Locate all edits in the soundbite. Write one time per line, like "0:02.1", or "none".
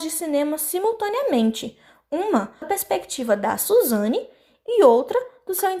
0:02.6